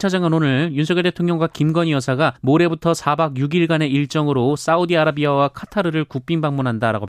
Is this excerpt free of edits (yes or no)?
no